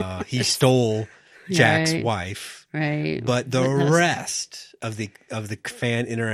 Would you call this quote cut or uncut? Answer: uncut